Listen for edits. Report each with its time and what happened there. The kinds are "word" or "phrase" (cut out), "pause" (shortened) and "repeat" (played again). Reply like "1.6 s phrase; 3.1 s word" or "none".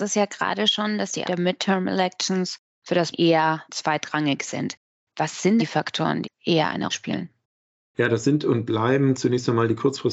1.3 s word; 3.1 s word; 3.6 s word; 5.6 s word; 6.2 s word; 6.9 s word